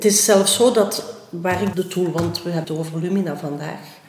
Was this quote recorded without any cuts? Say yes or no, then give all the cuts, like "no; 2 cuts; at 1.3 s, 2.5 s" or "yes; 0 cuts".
no; 2 cuts; at 1.7 s, 2.6 s